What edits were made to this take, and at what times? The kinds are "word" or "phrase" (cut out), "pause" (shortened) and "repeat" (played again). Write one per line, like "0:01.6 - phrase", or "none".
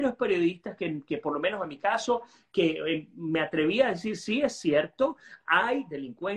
none